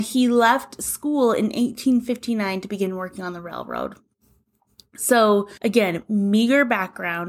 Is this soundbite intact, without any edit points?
no; 1 cut; at 5.6 s

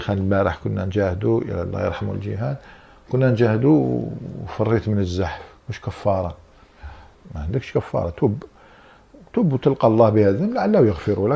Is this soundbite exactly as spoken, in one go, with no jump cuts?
yes; 0 cuts

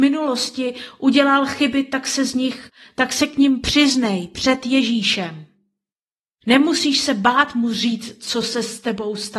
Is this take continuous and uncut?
yes; 0 cuts

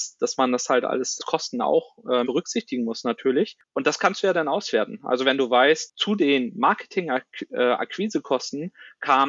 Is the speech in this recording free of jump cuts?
no; 2 cuts; at 1.2 s, 2.2 s

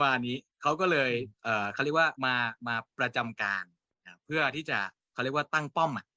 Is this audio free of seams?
no; 4 cuts; at 1.3 s, 2.2 s, 2.6 s, 5.0 s

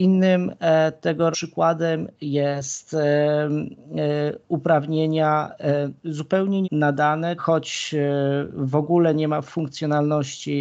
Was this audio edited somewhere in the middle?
yes; 4 cuts; at 1.3 s, 6.0 s, 6.6 s, 7.4 s

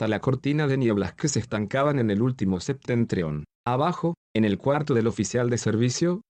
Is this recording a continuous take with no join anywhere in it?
yes; 0 cuts

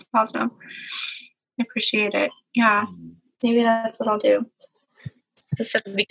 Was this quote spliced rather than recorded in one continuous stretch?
no; 0 cuts

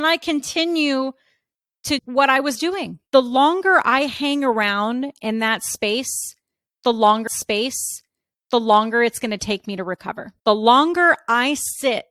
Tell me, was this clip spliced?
yes; 4 cuts; at 2.0 s, 3.1 s, 7.3 s, 10.4 s

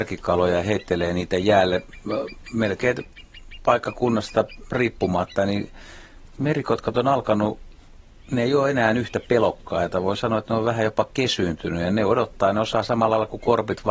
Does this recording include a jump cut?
no; 0 cuts

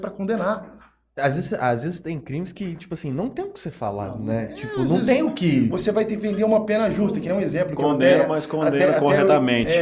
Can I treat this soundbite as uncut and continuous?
yes; 0 cuts

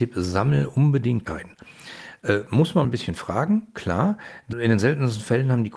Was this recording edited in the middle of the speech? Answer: yes; 3 cuts; at 1.2 s, 2.8 s, 4.5 s

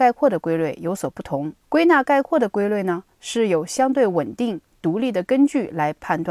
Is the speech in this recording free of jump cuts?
no; 1 cut; at 1.6 s

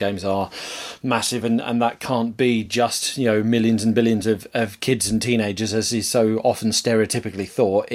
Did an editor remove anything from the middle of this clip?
no; 0 cuts

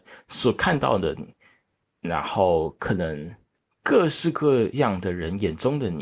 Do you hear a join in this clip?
no; 0 cuts

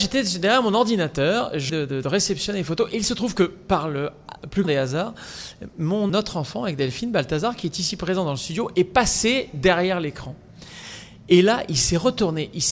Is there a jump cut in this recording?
yes; 3 cuts; at 1.7 s, 4.6 s, 6.1 s

